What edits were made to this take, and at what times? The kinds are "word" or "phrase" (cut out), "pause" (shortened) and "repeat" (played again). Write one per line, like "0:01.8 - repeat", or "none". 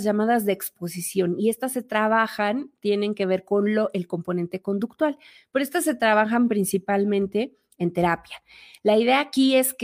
none